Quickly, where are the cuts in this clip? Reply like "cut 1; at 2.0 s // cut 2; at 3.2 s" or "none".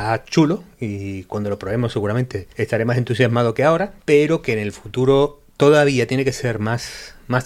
cut 1; at 2.5 s // cut 2; at 4.0 s

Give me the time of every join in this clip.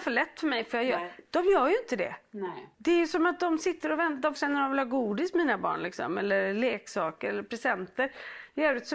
cut 1; at 2.7 s // cut 2; at 4.4 s

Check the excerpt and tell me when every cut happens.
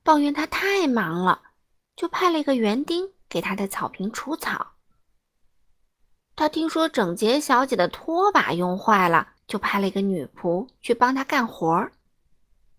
cut 1; at 9.4 s

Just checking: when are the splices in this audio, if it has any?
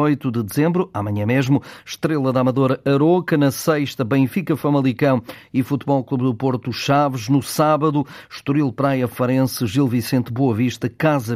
none

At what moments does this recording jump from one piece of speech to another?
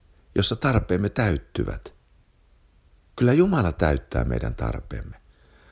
none

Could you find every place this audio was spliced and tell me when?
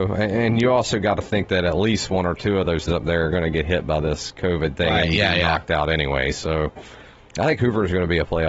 cut 1; at 2.9 s

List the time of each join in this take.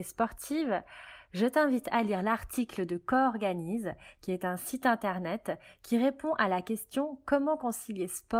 none

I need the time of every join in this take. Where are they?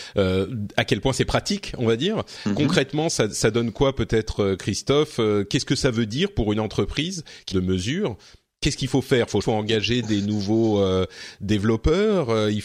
cut 1; at 7.5 s // cut 2; at 9.4 s

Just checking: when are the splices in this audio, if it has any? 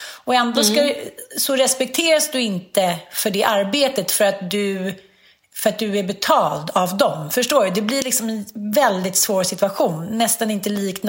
none

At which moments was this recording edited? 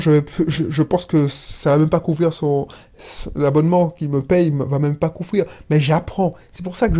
none

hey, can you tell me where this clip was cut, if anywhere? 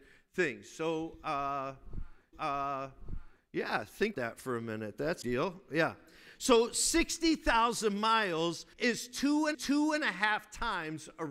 cut 1; at 2.3 s // cut 2; at 4.1 s // cut 3; at 5.2 s // cut 4; at 8.7 s // cut 5; at 9.5 s

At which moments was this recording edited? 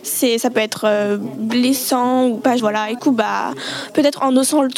cut 1; at 2.6 s // cut 2; at 3.0 s

